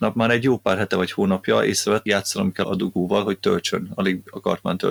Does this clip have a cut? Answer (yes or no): yes